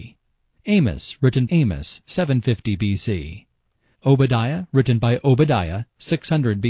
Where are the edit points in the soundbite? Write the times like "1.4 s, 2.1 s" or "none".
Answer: 1.5 s